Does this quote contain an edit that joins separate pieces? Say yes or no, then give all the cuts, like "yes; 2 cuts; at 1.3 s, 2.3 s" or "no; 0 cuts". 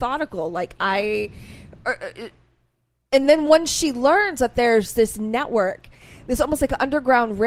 no; 0 cuts